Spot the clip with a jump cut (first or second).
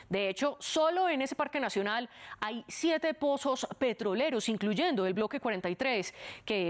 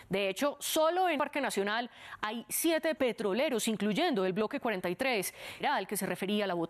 second